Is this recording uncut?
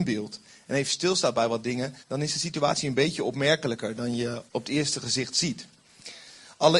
no; 2 cuts; at 2.0 s, 4.5 s

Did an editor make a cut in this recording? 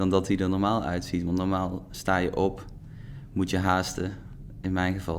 no; 0 cuts

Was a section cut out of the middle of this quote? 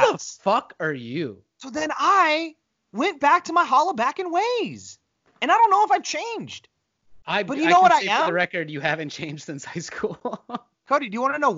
no; 0 cuts

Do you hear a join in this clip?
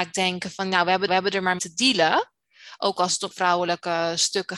yes; 3 cuts; at 1.1 s, 1.6 s, 3.3 s

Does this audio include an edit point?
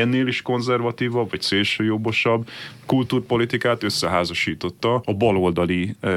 no; 0 cuts

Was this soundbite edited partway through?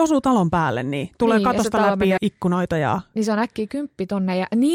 yes; 1 cut; at 2.2 s

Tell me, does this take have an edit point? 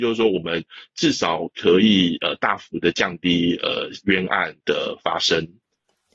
yes; 1 cut; at 4.6 s

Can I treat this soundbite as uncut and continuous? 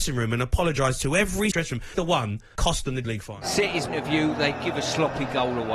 no; 5 cuts; at 1.5 s, 1.9 s, 2.6 s, 3.0 s, 3.9 s

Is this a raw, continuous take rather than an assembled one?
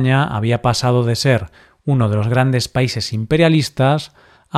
yes; 0 cuts

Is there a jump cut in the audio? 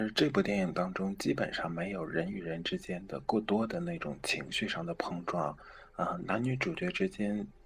no; 0 cuts

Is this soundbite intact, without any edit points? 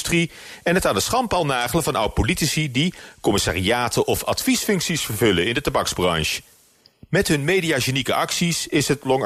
yes; 0 cuts

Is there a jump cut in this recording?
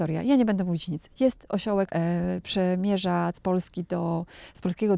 yes; 2 cuts; at 1.9 s, 3.3 s

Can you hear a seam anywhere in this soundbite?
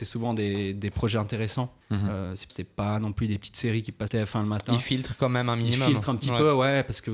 yes; 3 cuts; at 1.8 s, 2.5 s, 4.1 s

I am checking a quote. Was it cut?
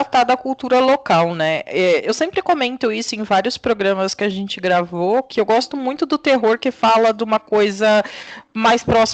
no; 0 cuts

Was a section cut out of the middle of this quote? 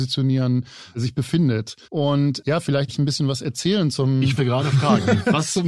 yes; 3 cuts; at 1.8 s, 2.9 s, 4.4 s

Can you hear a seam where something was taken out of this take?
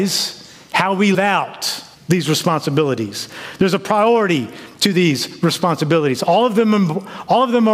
yes; 2 cuts; at 1.1 s, 1.9 s

